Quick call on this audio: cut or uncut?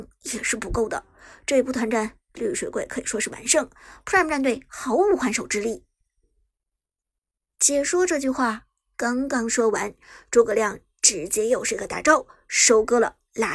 uncut